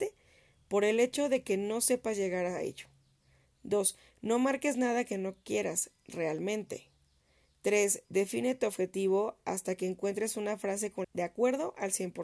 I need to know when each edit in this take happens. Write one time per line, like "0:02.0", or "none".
0:11.0